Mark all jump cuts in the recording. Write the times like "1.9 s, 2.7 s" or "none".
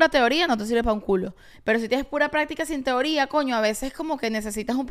none

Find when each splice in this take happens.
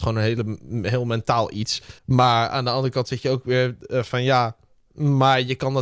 2.0 s

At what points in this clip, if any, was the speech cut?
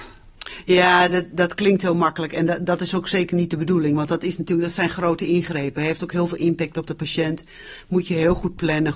none

